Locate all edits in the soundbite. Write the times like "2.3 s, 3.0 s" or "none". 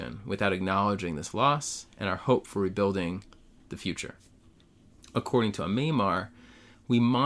none